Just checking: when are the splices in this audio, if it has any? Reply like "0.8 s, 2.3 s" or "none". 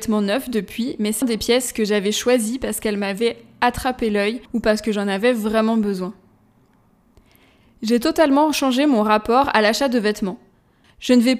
1.2 s, 4.5 s